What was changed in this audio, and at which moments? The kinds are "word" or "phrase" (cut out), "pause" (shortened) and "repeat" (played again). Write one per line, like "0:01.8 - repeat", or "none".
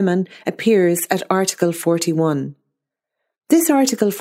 none